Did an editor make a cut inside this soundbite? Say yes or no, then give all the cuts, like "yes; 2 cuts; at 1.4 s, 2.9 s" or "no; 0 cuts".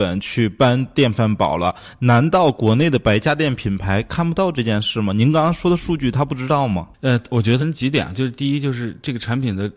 yes; 1 cut; at 6.9 s